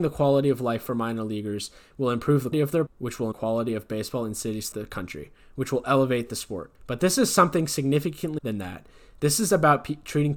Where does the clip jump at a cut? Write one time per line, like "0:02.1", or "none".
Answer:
0:02.5
0:02.9
0:03.3
0:04.7
0:06.8
0:08.4